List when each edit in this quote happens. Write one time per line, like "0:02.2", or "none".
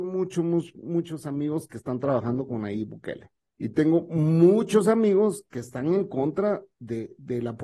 0:03.5